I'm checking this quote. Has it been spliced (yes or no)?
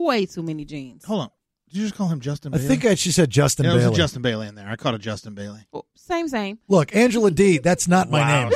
no